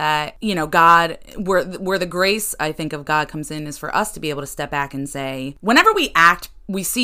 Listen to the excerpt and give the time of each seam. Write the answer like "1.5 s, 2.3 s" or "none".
none